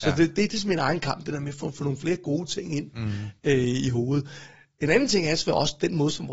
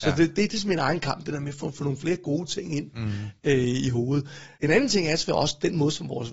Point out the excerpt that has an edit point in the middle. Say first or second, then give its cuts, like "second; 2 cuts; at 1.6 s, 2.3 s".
second; 1 cut; at 4.5 s